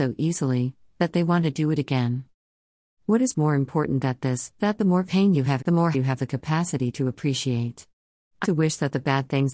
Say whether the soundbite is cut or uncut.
cut